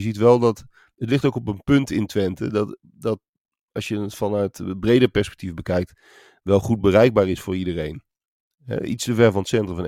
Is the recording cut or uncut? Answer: uncut